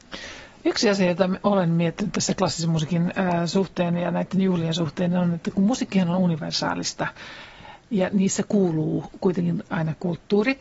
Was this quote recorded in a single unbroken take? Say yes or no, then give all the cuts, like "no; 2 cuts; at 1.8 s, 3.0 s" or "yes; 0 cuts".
yes; 0 cuts